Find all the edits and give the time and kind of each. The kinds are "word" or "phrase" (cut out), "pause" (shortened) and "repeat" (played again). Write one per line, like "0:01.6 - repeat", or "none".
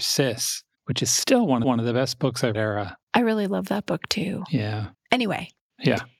0:01.6 - repeat
0:02.5 - phrase
0:03.0 - pause
0:04.9 - pause